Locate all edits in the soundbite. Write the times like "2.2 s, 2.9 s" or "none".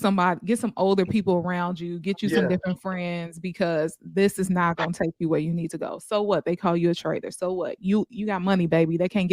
none